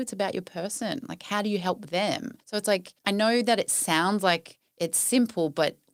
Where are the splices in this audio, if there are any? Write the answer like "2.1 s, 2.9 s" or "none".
2.4 s, 3.0 s, 4.7 s